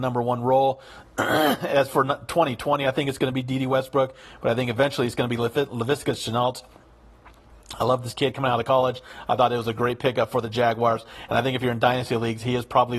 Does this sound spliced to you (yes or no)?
no